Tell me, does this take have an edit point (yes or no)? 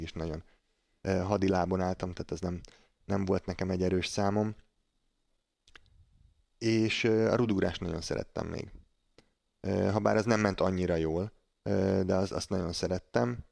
no